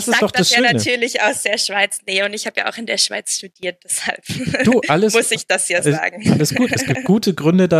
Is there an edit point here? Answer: no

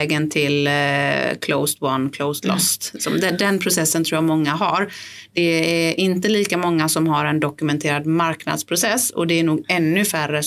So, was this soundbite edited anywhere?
no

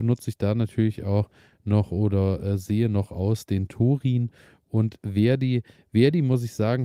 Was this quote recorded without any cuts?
yes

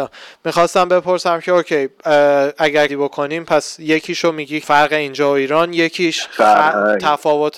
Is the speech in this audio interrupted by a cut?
yes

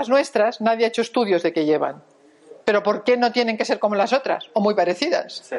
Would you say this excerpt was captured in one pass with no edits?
no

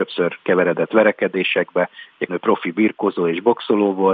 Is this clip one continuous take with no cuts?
no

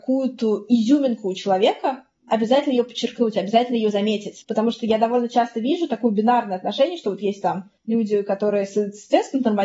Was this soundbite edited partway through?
no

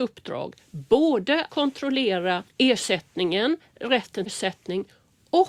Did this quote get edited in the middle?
yes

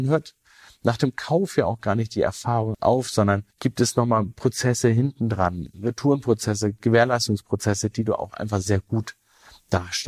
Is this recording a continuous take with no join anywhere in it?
no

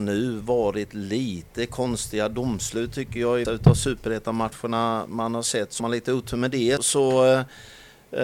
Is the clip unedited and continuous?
no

